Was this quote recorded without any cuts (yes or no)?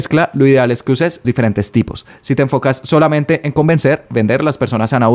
no